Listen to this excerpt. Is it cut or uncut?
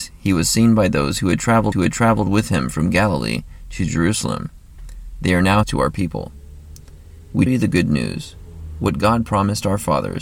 cut